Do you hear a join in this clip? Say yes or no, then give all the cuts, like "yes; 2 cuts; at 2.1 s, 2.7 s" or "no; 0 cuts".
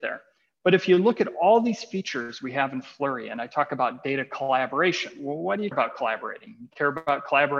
yes; 1 cut; at 5.7 s